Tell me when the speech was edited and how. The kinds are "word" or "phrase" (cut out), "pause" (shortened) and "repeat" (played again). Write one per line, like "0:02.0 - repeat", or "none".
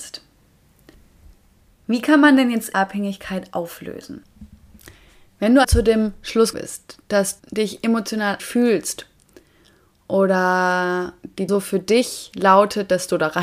0:02.7 - word
0:05.6 - word
0:06.5 - word
0:07.4 - word
0:08.4 - word
0:11.5 - word